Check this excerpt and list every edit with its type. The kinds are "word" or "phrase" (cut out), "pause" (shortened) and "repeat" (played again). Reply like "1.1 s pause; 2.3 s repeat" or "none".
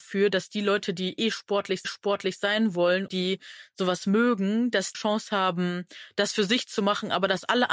1.8 s repeat; 3.1 s word; 4.9 s phrase